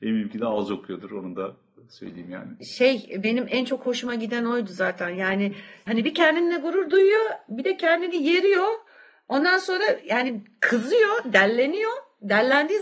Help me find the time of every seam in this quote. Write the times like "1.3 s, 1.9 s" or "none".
none